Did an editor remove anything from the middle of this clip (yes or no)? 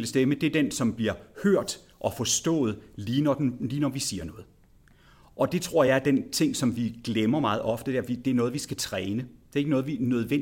no